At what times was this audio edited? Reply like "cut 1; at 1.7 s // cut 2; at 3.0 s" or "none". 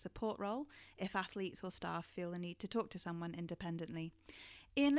none